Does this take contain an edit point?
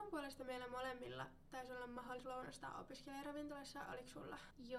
yes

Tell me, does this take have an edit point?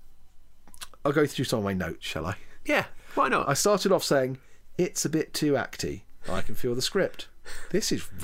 no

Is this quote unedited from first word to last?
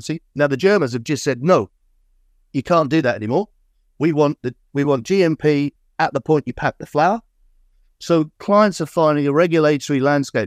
yes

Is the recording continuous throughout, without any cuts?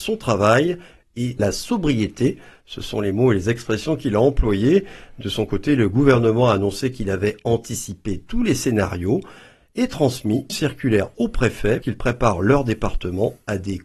no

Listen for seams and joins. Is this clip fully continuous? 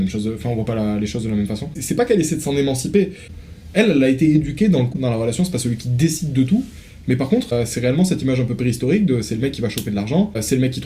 no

